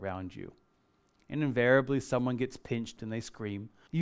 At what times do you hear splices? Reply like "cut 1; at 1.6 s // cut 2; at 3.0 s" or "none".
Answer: cut 1; at 3.0 s

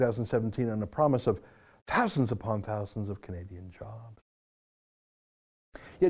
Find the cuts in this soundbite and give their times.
none

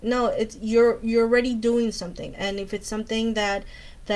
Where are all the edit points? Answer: cut 1; at 2.3 s

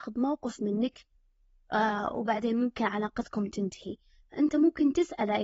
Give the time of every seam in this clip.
none

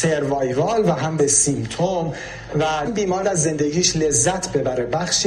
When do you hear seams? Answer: cut 1; at 1.2 s // cut 2; at 2.8 s // cut 3; at 3.2 s

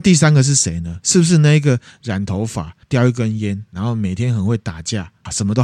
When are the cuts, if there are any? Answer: cut 1; at 2.8 s

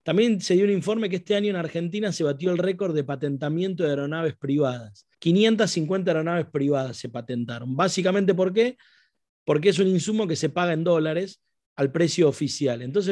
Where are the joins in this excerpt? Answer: cut 1; at 5.1 s

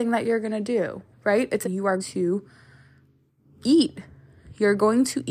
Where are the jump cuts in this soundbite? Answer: cut 1; at 1.1 s // cut 2; at 1.6 s // cut 3; at 2.0 s

